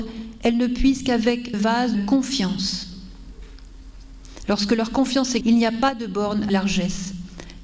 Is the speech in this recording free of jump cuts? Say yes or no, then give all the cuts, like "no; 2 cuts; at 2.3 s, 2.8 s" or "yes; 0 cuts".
no; 4 cuts; at 1.5 s, 1.9 s, 5.4 s, 6.5 s